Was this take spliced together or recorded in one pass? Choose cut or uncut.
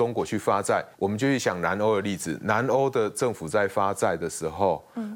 cut